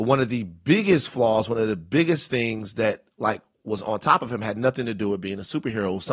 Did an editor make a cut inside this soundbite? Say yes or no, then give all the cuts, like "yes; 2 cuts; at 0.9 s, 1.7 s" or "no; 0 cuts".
no; 0 cuts